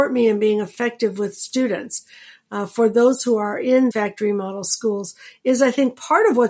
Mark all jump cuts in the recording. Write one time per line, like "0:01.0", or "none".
0:03.9